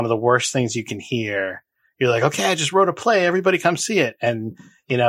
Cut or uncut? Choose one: uncut